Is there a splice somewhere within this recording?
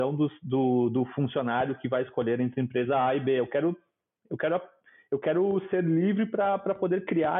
no; 0 cuts

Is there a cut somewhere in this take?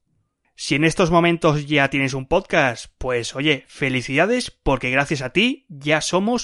no; 0 cuts

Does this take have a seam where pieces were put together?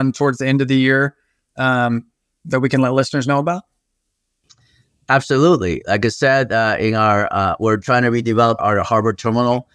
yes; 1 cut; at 8.6 s

